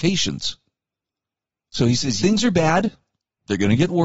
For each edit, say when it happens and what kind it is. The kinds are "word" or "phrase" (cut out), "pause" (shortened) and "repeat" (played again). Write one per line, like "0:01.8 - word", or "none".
0:01.2 - pause
0:02.2 - word